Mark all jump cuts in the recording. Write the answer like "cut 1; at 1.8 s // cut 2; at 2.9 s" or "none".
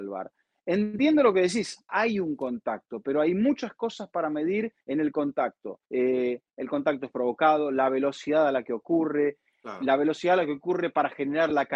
cut 1; at 1.9 s // cut 2; at 4.8 s // cut 3; at 5.9 s